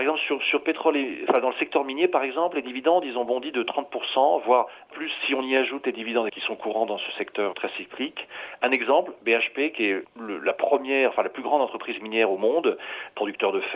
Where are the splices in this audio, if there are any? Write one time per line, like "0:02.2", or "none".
0:04.9
0:06.3
0:07.5
0:10.0